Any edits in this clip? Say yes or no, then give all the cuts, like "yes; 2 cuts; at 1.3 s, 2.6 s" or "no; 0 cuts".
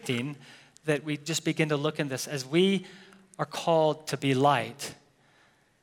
no; 0 cuts